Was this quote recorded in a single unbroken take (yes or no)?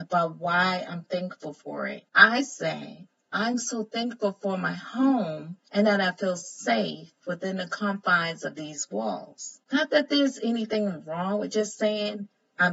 no